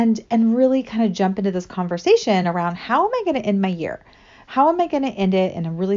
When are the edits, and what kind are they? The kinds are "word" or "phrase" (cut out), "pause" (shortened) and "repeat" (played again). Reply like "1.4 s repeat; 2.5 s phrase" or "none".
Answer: none